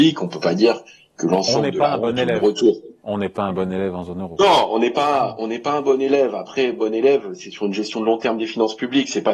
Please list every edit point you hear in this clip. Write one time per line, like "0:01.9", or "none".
none